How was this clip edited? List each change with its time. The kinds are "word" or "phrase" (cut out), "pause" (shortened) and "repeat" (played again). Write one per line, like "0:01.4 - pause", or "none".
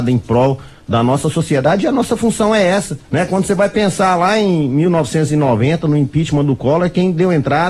0:03.0 - pause